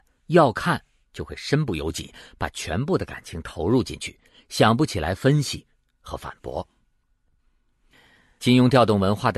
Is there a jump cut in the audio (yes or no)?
no